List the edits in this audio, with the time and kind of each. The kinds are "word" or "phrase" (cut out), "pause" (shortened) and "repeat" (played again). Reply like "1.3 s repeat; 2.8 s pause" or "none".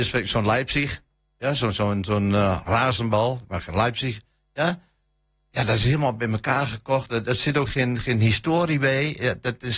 7.7 s word